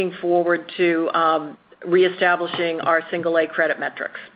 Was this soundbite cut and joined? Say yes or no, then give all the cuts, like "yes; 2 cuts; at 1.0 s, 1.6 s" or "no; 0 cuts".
no; 0 cuts